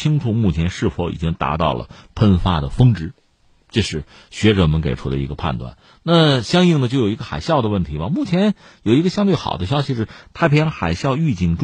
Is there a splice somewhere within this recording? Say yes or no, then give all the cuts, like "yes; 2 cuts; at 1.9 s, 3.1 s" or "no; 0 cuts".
no; 0 cuts